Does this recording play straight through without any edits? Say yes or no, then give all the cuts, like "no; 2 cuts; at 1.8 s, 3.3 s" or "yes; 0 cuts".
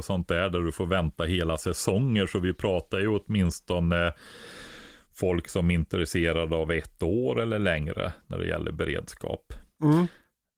yes; 0 cuts